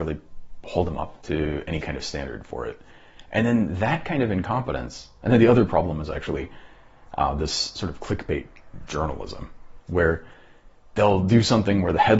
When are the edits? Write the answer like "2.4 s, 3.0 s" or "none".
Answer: none